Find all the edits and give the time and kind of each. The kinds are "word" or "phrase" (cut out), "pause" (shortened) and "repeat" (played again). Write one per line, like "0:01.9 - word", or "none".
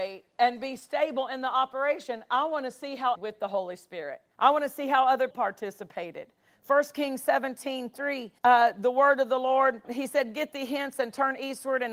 0:03.1 - phrase
0:04.3 - pause
0:05.3 - word
0:08.4 - pause
0:09.8 - word